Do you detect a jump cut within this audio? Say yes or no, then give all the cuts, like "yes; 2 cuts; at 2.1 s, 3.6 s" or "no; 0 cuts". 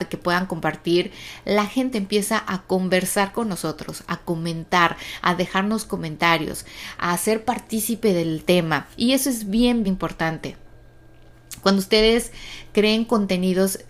yes; 3 cuts; at 1.9 s, 8.9 s, 9.8 s